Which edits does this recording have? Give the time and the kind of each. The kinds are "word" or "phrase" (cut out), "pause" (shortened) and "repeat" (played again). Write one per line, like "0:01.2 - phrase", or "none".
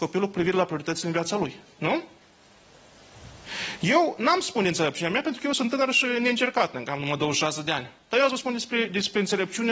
none